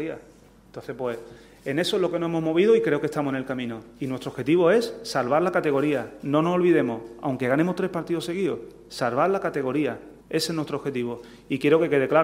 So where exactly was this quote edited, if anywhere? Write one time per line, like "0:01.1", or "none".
0:10.2